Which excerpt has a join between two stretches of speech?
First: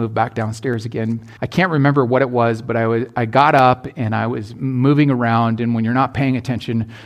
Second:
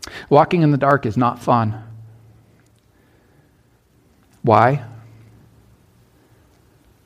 first; 1 cut; at 1.4 s

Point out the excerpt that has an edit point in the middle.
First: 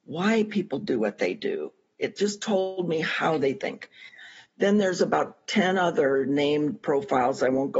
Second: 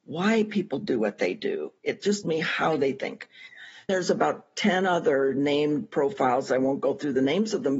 second; 3 cuts; at 1.8 s, 2.2 s, 3.9 s

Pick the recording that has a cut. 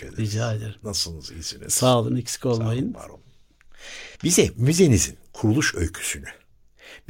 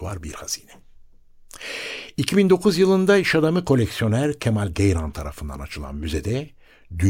first; 1 cut; at 4.1 s

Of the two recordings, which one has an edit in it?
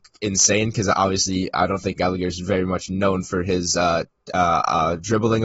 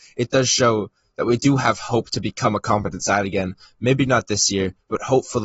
first; 1 cut; at 2.0 s

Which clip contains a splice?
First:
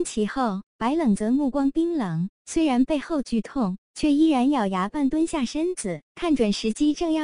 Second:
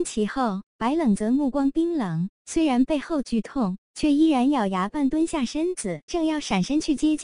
second; 1 cut; at 6.1 s

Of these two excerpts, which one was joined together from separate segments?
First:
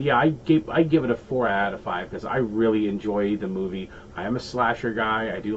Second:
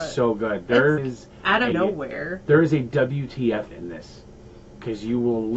second; 3 cuts; at 1.0 s, 1.7 s, 3.7 s

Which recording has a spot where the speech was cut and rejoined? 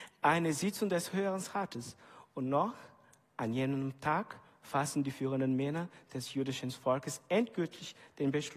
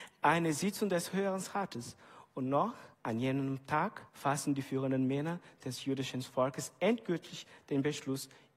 second; 2 cuts; at 2.9 s, 4.1 s

